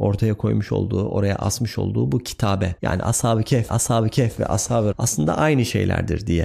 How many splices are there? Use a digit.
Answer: 3